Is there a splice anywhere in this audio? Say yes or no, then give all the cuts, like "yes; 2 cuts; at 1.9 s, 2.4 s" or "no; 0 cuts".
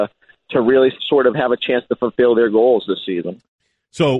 yes; 1 cut; at 1.0 s